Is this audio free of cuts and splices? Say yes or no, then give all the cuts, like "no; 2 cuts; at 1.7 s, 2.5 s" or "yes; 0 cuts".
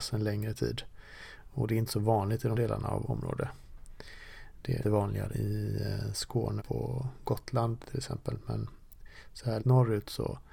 no; 6 cuts; at 2.5 s, 3.0 s, 4.8 s, 5.3 s, 6.6 s, 9.6 s